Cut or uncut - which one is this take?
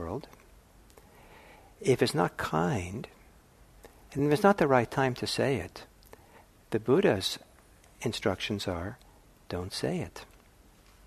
uncut